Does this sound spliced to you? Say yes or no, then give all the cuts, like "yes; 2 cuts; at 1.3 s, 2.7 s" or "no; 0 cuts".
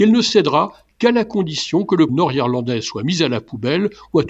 yes; 1 cut; at 2.1 s